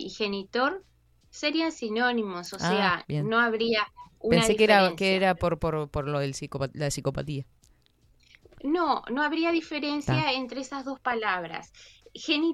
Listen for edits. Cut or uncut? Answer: uncut